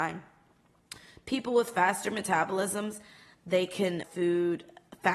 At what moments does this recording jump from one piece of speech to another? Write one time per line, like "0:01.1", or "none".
0:04.0